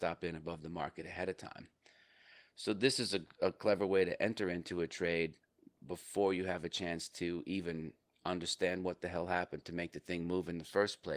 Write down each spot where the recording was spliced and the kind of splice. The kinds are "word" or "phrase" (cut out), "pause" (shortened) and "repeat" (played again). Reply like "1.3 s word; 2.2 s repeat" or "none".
none